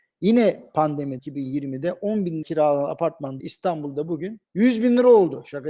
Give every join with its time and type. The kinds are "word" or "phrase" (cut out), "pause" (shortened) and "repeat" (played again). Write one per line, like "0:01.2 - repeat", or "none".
0:01.2 - word
0:02.4 - word
0:03.4 - word
0:04.4 - pause